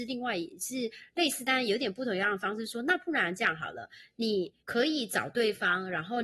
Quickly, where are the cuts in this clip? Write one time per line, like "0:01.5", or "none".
0:04.6